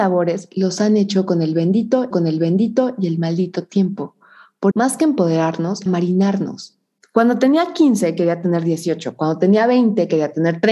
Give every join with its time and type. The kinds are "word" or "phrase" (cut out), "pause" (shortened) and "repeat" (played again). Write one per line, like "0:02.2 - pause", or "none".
0:02.1 - repeat
0:04.7 - phrase
0:05.9 - phrase